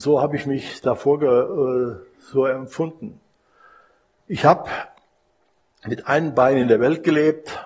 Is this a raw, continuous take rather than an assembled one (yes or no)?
yes